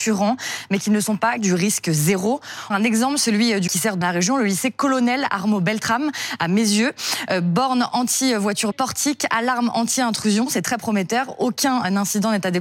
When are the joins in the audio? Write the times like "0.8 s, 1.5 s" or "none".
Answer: 1.4 s, 2.7 s, 3.7 s, 4.0 s, 8.7 s